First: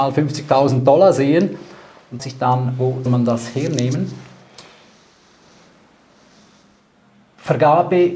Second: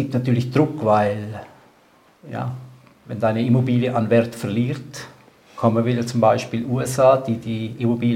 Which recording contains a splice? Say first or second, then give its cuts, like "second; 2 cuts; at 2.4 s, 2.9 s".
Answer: first; 2 cuts; at 2.2 s, 3.1 s